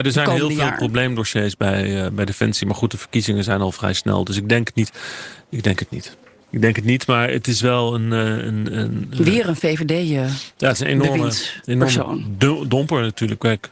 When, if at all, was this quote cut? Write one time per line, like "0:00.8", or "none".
none